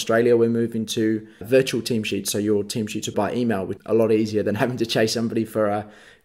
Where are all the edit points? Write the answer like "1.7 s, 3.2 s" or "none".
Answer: 1.4 s, 3.1 s, 3.8 s